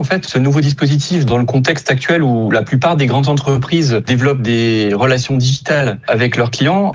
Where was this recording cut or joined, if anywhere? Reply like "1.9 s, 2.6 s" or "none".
none

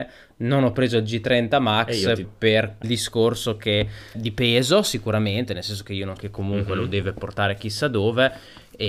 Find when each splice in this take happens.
2.2 s, 2.8 s, 4.1 s, 6.2 s

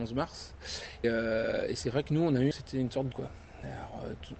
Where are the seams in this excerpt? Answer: 1.0 s, 2.5 s, 3.1 s

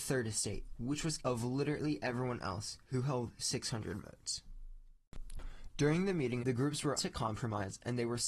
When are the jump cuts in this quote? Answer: 1.2 s, 2.8 s, 6.4 s, 7.0 s

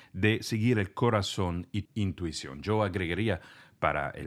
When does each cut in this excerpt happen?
1.9 s

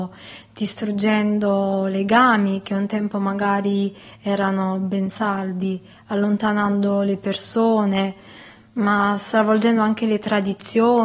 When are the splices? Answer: none

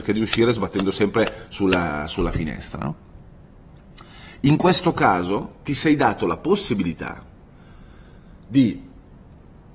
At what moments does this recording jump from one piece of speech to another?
none

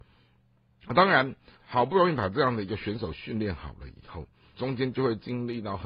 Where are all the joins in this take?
1.6 s, 4.5 s

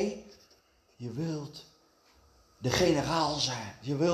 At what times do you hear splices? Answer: none

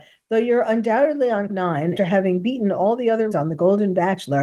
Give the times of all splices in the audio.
1.5 s, 2.0 s, 3.3 s

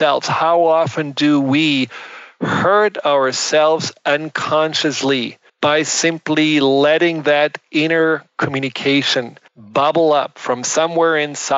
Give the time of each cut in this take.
5.5 s, 9.5 s

